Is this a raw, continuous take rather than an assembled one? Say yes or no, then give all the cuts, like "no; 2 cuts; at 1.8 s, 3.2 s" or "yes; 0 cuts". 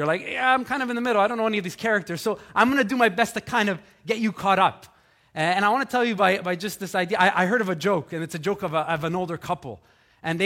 yes; 0 cuts